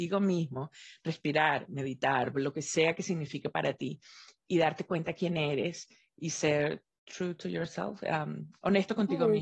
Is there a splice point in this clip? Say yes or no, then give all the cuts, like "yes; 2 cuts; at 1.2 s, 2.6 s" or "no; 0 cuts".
no; 0 cuts